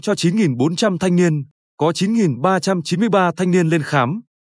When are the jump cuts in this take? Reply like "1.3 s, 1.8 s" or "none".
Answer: none